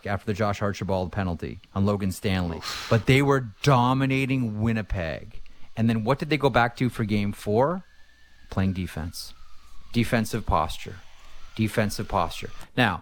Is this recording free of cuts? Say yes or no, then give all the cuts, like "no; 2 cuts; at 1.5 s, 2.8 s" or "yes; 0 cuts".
no; 1 cut; at 1.6 s